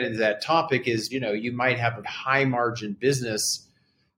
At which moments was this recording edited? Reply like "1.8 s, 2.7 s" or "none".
1.1 s, 2.0 s